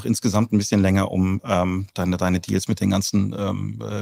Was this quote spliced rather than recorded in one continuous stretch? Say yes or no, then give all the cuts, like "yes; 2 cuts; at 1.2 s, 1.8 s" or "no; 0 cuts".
no; 0 cuts